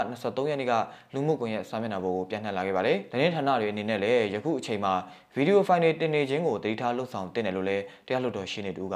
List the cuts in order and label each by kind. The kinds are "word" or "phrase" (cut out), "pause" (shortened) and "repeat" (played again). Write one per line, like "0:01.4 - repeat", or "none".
0:03.1 - pause